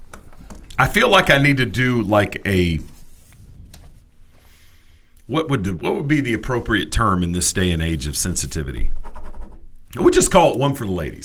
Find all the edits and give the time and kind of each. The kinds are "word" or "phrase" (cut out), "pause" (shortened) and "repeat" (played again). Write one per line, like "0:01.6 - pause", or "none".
0:09.8 - pause